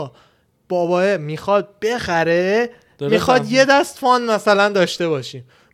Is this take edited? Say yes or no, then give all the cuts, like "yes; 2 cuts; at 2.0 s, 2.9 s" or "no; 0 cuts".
no; 0 cuts